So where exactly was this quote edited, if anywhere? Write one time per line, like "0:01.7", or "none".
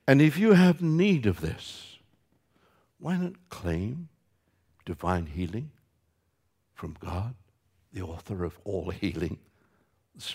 none